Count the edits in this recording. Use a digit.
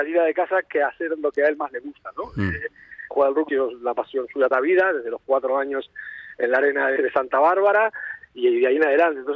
5